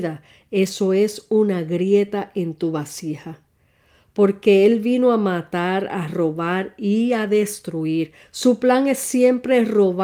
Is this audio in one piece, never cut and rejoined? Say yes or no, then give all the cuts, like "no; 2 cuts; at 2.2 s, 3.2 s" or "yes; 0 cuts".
yes; 0 cuts